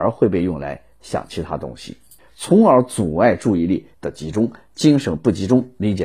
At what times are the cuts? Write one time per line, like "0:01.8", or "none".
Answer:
0:02.2
0:03.9